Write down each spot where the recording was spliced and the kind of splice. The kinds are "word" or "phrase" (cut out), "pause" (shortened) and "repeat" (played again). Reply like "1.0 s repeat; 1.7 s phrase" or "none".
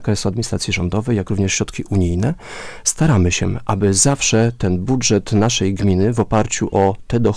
none